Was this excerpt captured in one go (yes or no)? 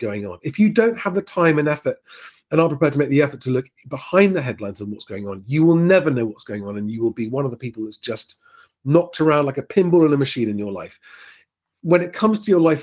yes